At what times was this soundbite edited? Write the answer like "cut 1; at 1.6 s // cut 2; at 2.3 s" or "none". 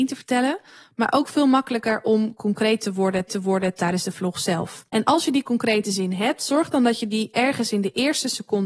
cut 1; at 3.3 s // cut 2; at 4.9 s